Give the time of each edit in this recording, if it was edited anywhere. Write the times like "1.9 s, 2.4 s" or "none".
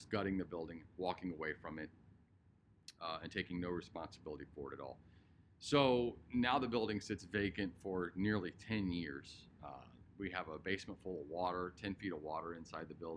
none